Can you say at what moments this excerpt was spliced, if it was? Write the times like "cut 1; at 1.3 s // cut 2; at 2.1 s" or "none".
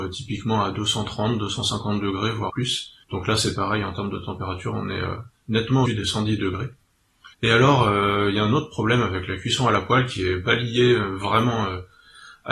cut 1; at 2.5 s // cut 2; at 3.0 s // cut 3; at 5.9 s // cut 4; at 7.3 s